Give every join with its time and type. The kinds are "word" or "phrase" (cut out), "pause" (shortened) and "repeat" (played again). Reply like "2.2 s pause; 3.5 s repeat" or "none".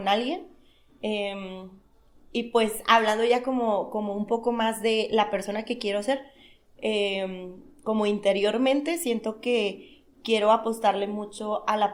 none